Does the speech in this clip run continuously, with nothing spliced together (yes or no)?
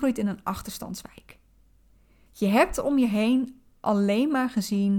yes